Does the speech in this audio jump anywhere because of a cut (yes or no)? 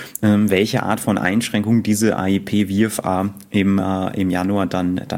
no